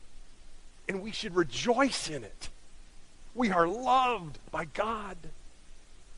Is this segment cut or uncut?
uncut